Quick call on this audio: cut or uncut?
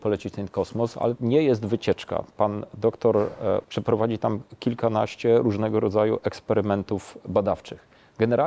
cut